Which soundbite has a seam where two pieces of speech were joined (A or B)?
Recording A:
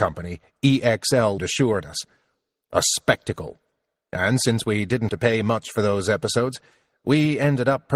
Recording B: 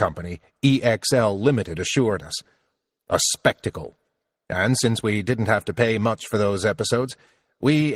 A